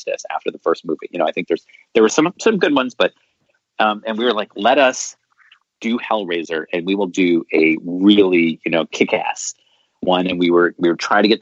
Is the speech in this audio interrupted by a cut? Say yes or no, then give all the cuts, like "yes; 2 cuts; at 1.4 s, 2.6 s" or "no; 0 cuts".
no; 0 cuts